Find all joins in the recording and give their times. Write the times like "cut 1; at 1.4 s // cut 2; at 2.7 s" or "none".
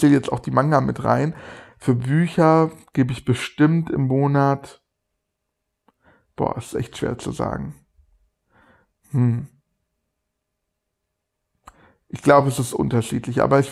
none